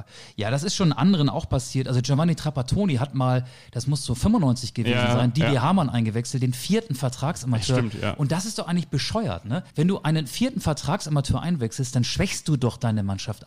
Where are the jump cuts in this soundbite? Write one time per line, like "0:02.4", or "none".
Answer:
0:09.7